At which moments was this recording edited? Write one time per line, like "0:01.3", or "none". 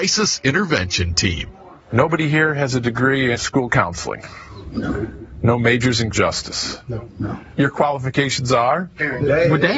0:01.8
0:03.3
0:06.1